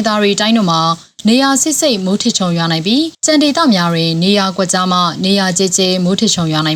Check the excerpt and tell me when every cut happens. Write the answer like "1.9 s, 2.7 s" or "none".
3.1 s